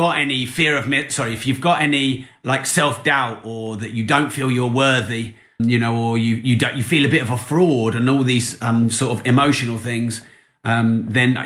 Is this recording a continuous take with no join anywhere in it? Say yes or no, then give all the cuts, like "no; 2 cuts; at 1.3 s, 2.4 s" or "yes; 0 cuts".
no; 1 cut; at 5.6 s